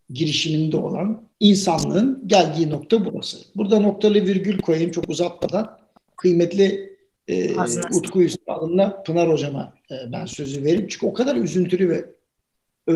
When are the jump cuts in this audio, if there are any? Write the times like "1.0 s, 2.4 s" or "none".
1.3 s